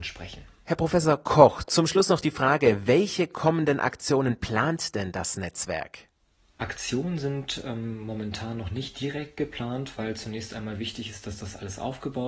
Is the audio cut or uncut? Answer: uncut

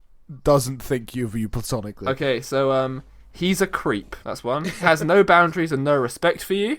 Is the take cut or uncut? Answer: cut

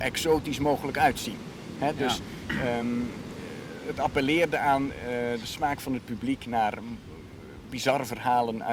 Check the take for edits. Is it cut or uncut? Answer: uncut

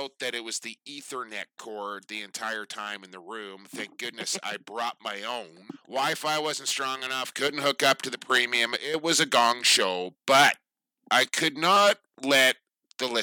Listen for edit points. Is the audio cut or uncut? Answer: uncut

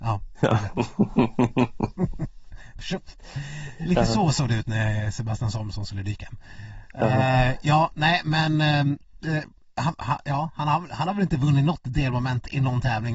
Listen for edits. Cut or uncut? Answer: uncut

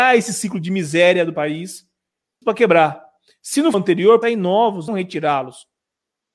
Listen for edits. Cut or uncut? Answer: cut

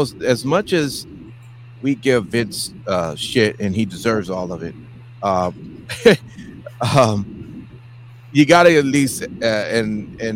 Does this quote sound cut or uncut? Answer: uncut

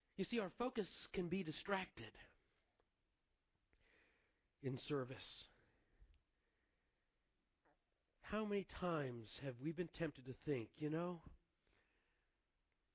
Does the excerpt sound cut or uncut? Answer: uncut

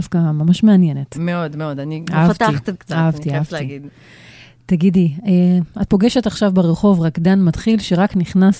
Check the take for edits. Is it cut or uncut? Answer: cut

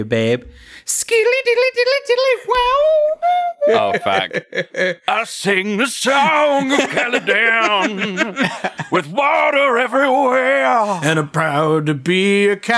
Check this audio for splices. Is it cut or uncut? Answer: uncut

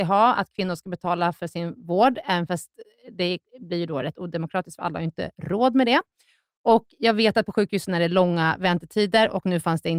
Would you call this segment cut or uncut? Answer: uncut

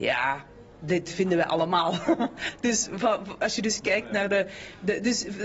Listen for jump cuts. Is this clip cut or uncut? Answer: uncut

